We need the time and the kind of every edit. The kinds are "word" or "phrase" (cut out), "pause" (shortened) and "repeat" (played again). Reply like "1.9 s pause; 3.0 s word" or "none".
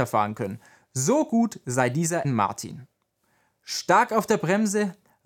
2.2 s word

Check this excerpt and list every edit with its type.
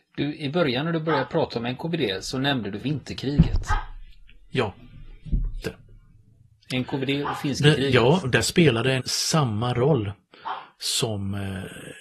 2.8 s word; 5.6 s word; 7.6 s word; 9.0 s word

